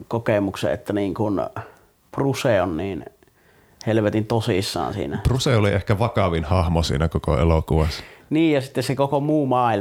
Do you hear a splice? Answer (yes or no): no